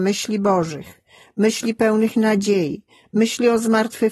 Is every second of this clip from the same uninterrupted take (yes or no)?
yes